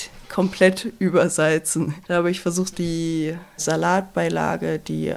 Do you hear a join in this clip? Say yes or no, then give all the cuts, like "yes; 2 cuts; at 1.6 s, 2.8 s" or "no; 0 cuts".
yes; 1 cut; at 2.7 s